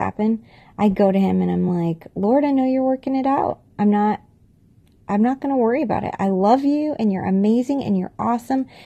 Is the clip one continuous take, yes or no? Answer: yes